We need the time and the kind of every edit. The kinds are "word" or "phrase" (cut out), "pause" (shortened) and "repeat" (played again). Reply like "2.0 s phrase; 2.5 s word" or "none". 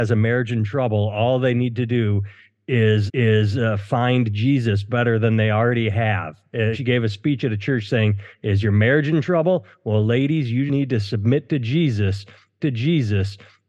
3.1 s repeat; 6.7 s word; 10.7 s word; 12.6 s repeat